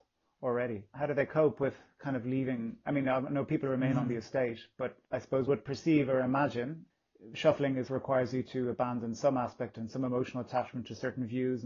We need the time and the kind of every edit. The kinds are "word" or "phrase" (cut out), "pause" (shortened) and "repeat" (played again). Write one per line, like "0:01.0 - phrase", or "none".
0:05.0 - pause
0:05.5 - word
0:07.9 - word